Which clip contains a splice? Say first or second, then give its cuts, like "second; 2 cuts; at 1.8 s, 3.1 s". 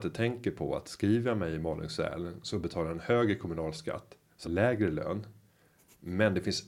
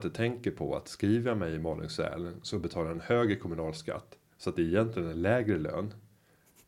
first; 1 cut; at 4.4 s